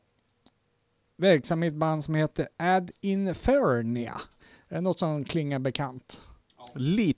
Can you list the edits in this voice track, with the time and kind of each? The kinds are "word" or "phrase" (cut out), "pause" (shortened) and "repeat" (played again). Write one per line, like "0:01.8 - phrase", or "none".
none